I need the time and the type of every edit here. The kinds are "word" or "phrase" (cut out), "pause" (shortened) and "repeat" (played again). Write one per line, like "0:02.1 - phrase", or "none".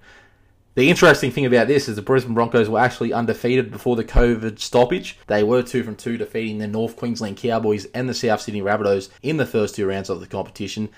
0:05.2 - pause
0:09.2 - pause